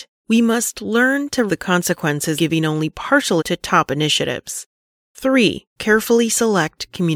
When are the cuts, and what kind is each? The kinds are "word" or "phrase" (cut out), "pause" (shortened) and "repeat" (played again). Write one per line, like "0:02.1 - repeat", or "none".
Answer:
0:01.5 - word
0:02.4 - word
0:03.4 - word